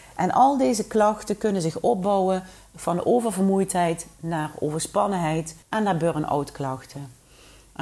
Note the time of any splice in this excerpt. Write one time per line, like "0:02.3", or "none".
0:05.6